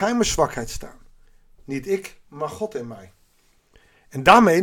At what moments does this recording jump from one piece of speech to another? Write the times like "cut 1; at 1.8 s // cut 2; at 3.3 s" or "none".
none